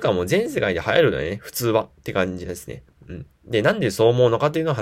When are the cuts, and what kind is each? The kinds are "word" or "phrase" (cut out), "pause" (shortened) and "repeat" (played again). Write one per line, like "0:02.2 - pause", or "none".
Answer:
0:03.3 - pause